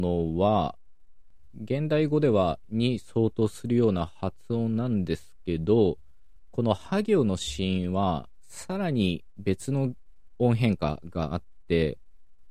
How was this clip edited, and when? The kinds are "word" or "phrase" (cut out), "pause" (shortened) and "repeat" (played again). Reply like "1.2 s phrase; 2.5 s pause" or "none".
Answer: 2.6 s word